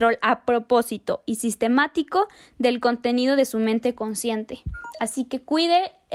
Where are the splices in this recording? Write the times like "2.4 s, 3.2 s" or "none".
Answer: none